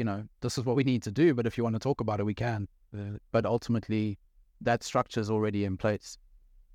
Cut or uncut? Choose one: uncut